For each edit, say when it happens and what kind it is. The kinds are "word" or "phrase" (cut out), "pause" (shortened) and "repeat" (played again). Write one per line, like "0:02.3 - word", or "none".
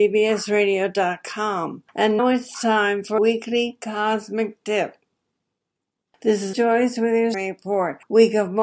0:02.2 - word
0:03.2 - word
0:06.5 - word
0:07.3 - word

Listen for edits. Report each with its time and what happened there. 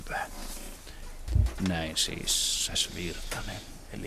0:02.7 - word

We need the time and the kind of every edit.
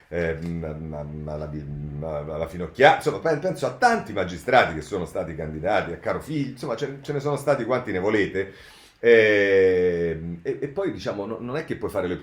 none

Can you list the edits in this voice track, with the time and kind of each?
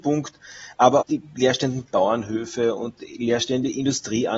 0:01.0 - word

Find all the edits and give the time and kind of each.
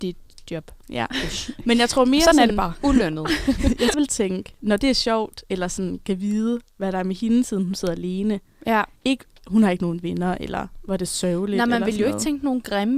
0:03.9 - phrase
0:09.0 - pause

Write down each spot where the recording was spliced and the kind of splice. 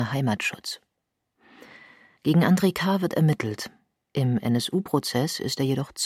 none

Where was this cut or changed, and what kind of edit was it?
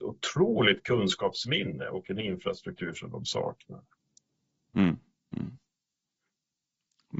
none

